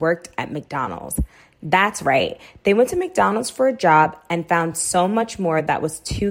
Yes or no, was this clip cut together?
no